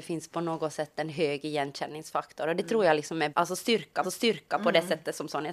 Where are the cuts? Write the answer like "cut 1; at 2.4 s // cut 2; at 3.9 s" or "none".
cut 1; at 3.3 s // cut 2; at 4.0 s